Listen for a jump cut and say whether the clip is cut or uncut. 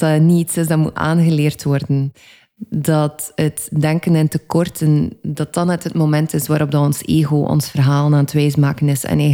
uncut